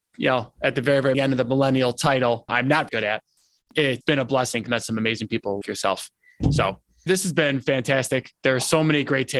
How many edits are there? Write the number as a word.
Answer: seven